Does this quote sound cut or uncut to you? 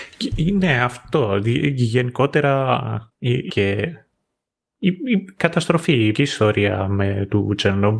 cut